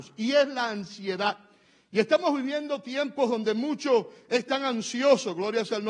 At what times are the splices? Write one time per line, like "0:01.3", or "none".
none